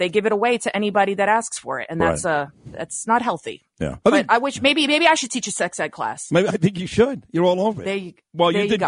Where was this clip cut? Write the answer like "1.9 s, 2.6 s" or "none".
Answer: 4.0 s